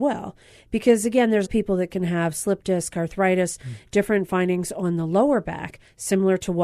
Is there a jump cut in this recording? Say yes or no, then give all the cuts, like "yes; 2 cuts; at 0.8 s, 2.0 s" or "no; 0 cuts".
yes; 1 cut; at 1.4 s